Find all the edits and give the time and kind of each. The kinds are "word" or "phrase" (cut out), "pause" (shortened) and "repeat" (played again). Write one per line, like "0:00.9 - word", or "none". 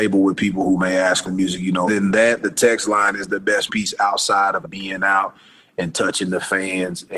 0:01.2 - word
0:01.9 - word
0:03.7 - word
0:04.6 - word